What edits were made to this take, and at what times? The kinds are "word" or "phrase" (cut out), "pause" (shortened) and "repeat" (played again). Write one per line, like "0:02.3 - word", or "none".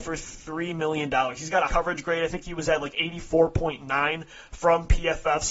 0:01.7 - word